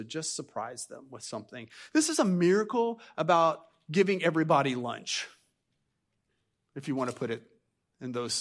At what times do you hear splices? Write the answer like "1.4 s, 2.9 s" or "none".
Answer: none

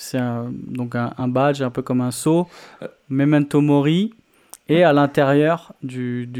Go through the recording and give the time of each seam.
none

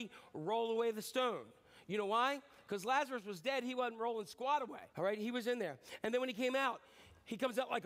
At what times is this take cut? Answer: 4.9 s

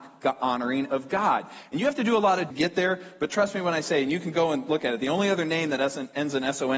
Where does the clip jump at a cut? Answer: 2.5 s

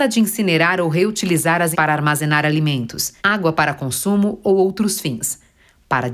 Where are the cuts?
1.7 s, 3.2 s

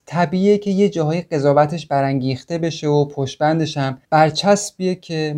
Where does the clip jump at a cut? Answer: 4.0 s

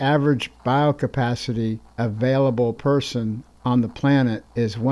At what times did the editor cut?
2.7 s

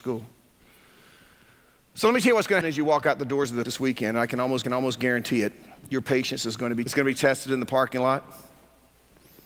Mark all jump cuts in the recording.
2.6 s, 3.7 s, 4.6 s, 6.9 s

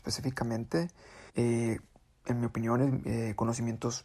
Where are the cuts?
1.3 s

